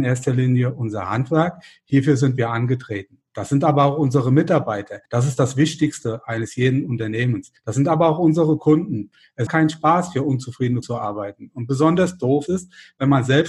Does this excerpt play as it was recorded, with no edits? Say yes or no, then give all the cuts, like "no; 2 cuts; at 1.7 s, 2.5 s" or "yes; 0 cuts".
no; 5 cuts; at 5.0 s, 7.6 s, 9.5 s, 10.8 s, 12.5 s